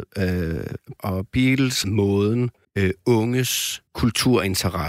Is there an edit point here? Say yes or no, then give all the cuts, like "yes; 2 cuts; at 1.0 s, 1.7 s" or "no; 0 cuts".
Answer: yes; 4 cuts; at 1.0 s, 1.8 s, 2.6 s, 3.9 s